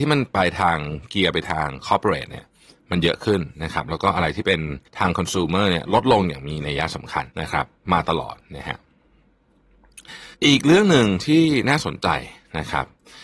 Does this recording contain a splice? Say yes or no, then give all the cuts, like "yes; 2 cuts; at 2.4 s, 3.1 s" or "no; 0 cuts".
yes; 3 cuts; at 4.9 s, 7.3 s, 10.3 s